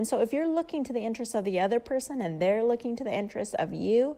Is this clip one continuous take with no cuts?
yes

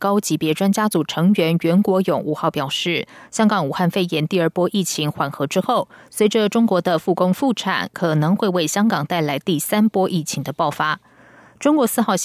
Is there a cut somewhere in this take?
no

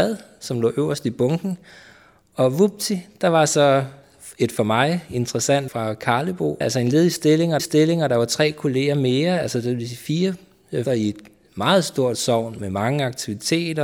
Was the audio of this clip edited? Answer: yes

